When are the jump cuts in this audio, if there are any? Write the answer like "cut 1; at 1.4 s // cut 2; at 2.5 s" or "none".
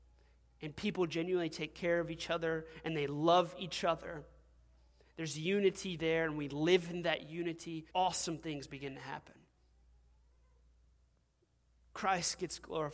cut 1; at 7.9 s